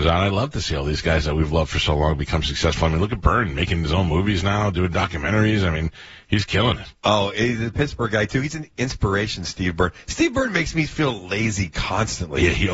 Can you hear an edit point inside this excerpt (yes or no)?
no